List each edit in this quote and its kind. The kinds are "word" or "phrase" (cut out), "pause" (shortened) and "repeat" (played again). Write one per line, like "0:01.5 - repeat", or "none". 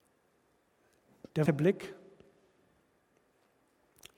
0:01.5 - word